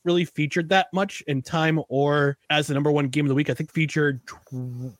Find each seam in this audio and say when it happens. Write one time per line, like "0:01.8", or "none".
0:01.4
0:02.4
0:03.7

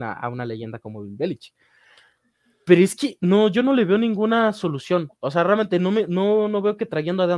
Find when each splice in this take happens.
none

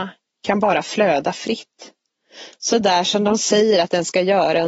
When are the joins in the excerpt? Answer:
none

